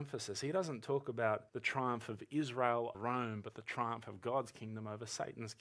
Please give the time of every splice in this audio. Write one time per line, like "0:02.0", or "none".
0:01.5
0:02.9

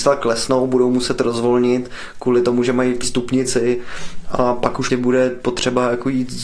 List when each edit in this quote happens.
0:03.0
0:04.9

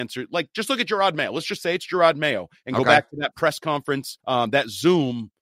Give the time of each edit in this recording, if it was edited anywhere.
0:04.2

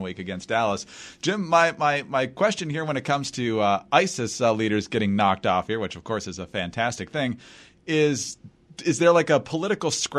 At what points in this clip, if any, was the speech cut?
none

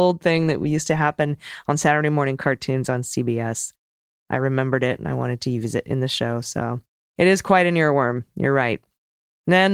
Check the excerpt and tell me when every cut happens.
none

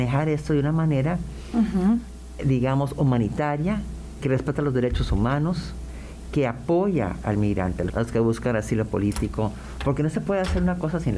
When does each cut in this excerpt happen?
0:07.9

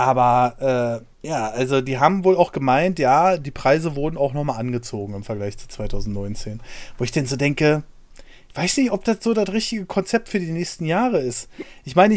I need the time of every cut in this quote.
0:01.1

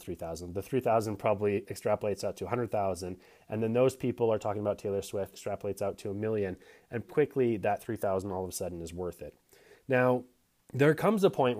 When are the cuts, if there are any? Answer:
0:05.3
0:07.1

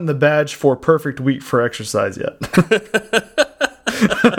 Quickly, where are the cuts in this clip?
none

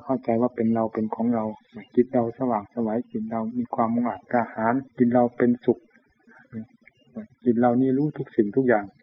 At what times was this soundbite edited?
0:04.9
0:07.3

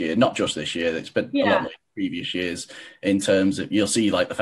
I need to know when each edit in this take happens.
none

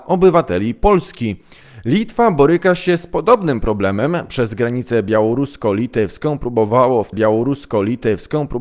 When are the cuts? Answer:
0:07.1

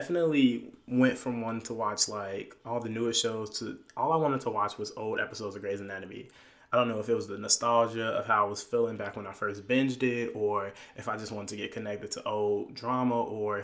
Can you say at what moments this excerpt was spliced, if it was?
none

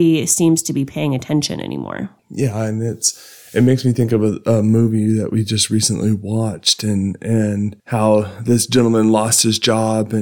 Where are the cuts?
0:02.2
0:07.8

